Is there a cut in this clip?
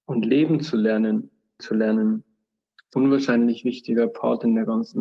yes; 2 cuts; at 1.6 s, 2.9 s

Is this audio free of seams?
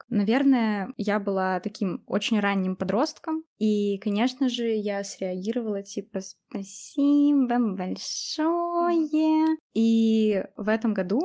yes; 0 cuts

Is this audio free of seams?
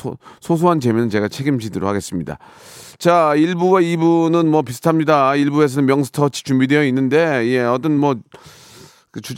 yes; 0 cuts

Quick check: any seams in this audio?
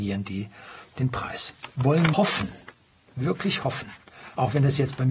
yes; 2 cuts; at 0.9 s, 2.1 s

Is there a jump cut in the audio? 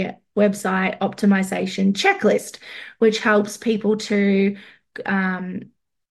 no; 0 cuts

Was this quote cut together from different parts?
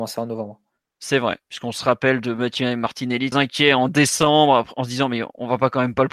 yes; 1 cut; at 3.3 s

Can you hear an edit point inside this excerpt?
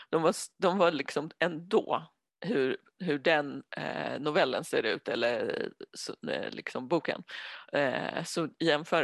no; 0 cuts

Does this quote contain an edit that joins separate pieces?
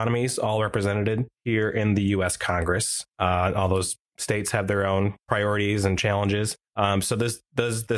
yes; 4 cuts; at 1.3 s, 3.1 s, 4.0 s, 6.7 s

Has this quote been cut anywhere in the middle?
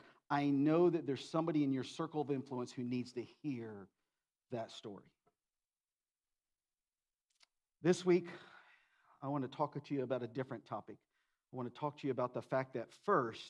no; 0 cuts

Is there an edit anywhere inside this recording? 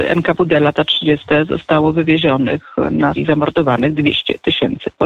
yes; 1 cut; at 3.2 s

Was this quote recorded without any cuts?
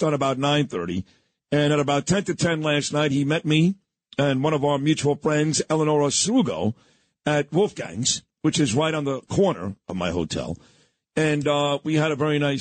yes; 0 cuts

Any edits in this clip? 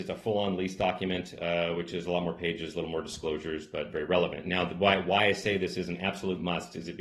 no; 0 cuts

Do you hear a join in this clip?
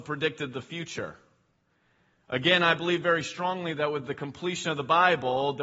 no; 0 cuts

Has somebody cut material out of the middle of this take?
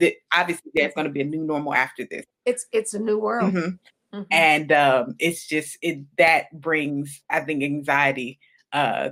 no; 0 cuts

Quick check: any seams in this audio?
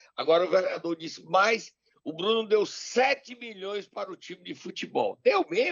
no; 0 cuts

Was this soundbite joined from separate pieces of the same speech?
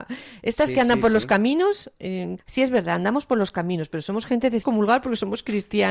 yes; 2 cuts; at 2.4 s, 4.6 s

